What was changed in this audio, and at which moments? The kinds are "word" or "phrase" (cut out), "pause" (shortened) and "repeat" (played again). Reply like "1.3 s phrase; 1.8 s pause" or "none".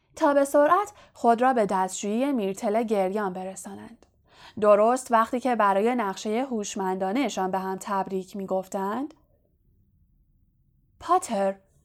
none